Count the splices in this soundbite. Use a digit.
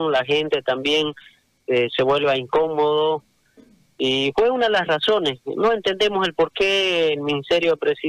0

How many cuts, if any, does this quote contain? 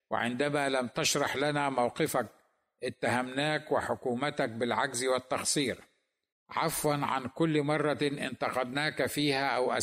0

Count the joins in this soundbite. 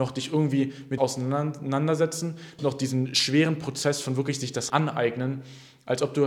3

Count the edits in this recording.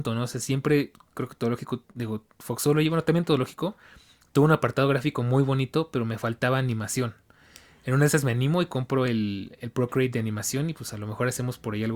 0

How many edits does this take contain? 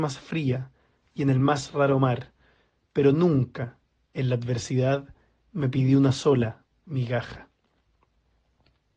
0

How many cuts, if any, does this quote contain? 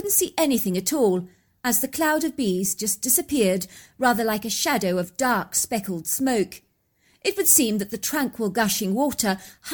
0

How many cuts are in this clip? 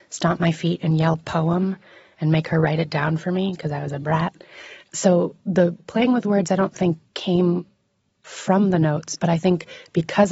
0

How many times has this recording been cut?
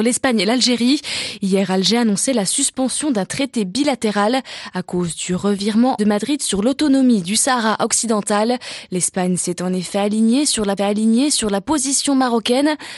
2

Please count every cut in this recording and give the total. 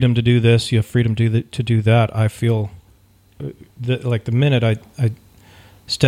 1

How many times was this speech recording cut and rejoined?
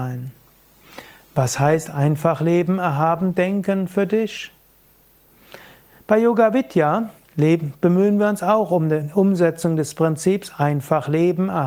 0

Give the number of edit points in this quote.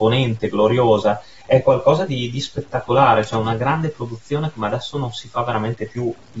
0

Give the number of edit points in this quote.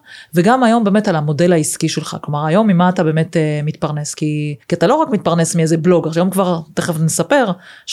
1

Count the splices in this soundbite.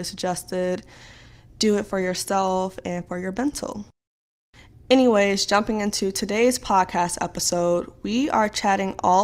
0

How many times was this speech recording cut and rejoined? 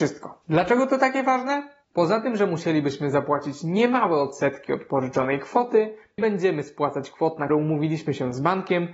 3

